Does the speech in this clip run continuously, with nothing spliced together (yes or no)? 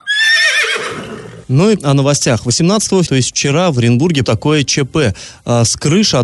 no